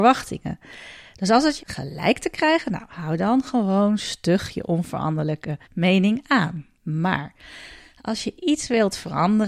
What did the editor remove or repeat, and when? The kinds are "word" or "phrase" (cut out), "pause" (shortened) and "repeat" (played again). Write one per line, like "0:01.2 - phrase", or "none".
0:01.6 - phrase
0:05.6 - pause
0:06.8 - pause